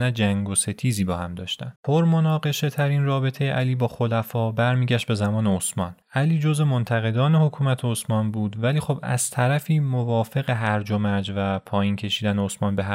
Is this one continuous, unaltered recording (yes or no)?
no